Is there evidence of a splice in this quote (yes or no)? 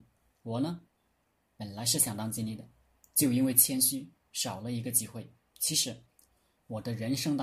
no